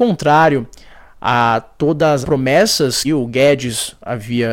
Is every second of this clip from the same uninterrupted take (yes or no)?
no